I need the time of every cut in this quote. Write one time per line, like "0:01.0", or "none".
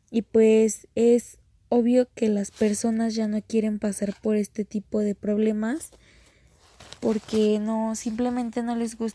none